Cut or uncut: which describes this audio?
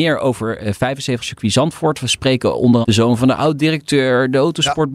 cut